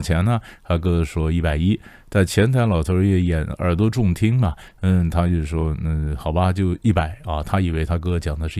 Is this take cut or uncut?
uncut